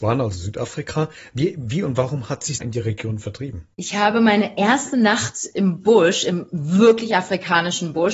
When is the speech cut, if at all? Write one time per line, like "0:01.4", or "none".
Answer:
0:02.6